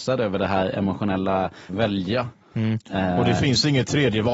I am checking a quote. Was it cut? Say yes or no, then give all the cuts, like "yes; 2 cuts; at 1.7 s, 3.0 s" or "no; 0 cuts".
yes; 2 cuts; at 1.7 s, 2.4 s